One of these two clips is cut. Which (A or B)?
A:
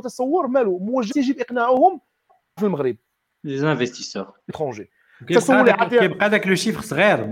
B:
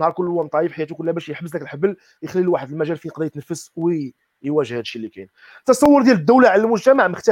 A